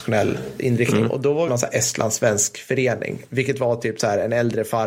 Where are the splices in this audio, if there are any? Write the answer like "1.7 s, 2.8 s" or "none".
1.5 s